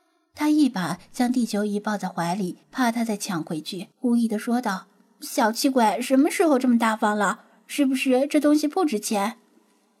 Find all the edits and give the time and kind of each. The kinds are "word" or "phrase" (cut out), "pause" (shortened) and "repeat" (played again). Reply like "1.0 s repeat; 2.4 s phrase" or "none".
2.6 s pause; 3.9 s pause